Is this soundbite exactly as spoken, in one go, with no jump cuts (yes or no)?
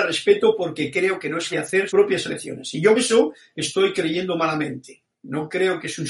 no